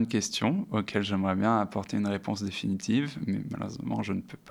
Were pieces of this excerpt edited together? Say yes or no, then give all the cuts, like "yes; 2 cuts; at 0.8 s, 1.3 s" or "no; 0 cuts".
no; 0 cuts